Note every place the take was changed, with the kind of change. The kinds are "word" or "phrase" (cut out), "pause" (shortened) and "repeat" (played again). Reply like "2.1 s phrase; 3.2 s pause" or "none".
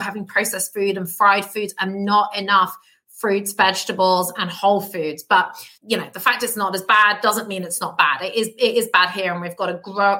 none